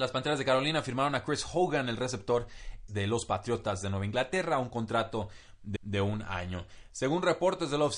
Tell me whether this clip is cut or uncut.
cut